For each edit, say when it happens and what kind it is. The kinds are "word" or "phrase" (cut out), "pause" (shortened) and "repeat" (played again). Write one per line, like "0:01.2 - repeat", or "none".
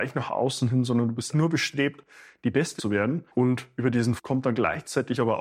0:01.3 - word
0:02.8 - phrase
0:03.3 - pause
0:04.2 - word